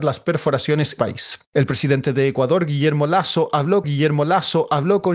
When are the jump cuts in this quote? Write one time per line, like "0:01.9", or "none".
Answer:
0:01.0
0:01.5
0:03.8